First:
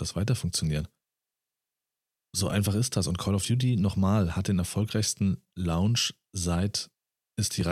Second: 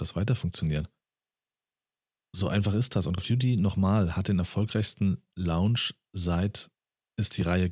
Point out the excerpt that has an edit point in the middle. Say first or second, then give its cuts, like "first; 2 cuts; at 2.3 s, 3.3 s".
second; 1 cut; at 3.2 s